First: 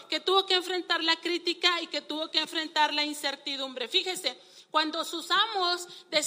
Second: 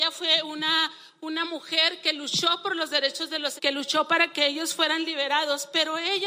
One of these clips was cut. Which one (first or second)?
second